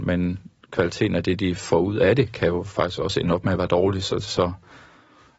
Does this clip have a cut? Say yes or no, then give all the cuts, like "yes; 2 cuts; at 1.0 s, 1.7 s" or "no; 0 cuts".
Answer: no; 0 cuts